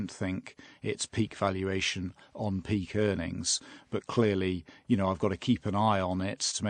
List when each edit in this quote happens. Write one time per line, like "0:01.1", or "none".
none